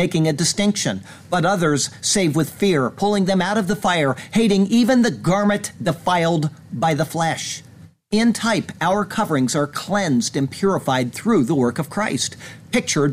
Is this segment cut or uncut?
uncut